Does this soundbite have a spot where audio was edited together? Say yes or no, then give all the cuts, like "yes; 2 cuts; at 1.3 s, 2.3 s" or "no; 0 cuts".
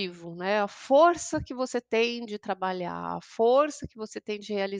no; 0 cuts